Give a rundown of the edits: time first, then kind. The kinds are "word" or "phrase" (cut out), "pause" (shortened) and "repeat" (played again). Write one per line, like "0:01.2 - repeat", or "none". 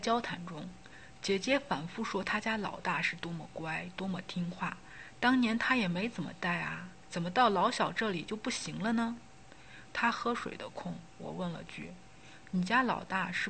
0:07.0 - phrase